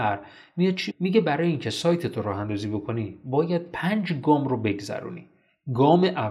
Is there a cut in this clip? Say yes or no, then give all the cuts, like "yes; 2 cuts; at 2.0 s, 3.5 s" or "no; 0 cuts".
yes; 1 cut; at 0.9 s